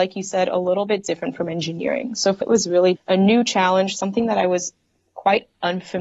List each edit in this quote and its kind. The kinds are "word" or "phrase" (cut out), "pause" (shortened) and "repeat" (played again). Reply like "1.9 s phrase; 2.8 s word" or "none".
2.4 s word; 3.0 s word